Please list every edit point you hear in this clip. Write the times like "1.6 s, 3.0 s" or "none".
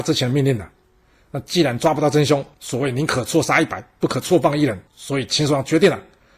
2.5 s, 4.9 s